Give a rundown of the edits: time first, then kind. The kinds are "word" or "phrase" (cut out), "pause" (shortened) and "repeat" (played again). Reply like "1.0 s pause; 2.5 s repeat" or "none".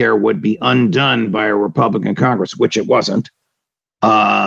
none